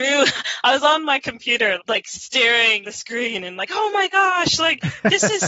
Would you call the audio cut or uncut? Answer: cut